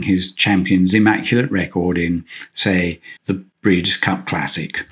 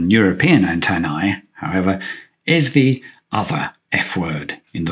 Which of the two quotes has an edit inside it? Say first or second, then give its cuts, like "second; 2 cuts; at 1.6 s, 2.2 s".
first; 1 cut; at 3.2 s